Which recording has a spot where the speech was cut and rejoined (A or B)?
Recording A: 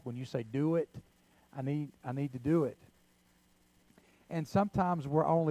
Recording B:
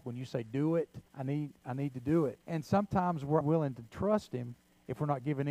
B